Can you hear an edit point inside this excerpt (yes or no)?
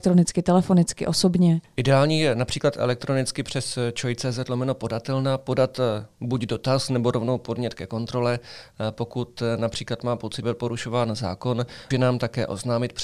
yes